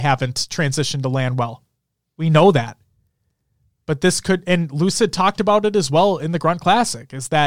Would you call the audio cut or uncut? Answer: uncut